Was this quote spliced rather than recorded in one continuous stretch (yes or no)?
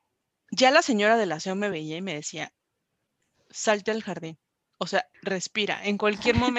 no